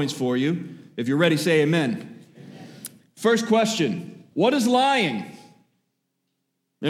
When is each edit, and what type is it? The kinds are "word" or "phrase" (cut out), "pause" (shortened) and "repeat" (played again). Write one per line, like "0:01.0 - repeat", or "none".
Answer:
0:04.3 - pause